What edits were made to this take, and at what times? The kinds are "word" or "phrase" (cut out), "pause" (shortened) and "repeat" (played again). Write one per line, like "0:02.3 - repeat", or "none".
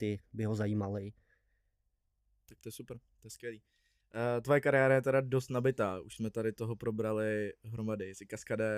none